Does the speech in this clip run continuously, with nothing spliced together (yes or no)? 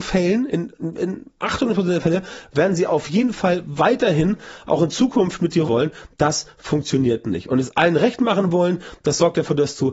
no